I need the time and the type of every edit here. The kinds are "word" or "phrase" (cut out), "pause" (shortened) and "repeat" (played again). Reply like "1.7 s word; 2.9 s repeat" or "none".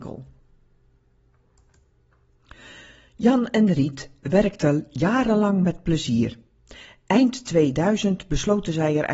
none

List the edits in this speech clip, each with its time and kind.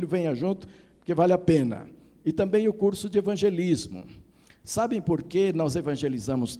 none

